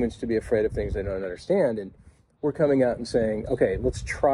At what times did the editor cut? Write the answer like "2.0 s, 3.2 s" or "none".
none